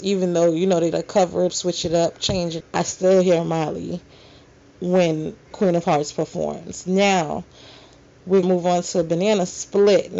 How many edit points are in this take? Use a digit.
5